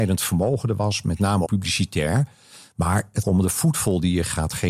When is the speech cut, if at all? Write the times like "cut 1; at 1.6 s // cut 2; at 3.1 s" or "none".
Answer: cut 1; at 1.5 s // cut 2; at 3.2 s